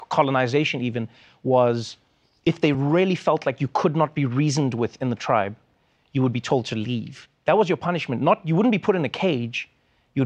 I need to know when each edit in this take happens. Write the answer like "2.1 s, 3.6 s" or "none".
none